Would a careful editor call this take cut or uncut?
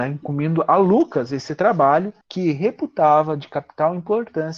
cut